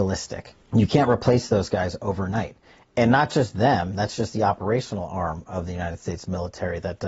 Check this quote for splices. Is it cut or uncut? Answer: uncut